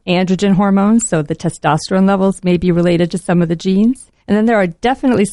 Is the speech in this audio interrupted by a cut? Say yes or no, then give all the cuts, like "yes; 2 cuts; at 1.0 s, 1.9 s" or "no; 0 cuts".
yes; 1 cut; at 4.2 s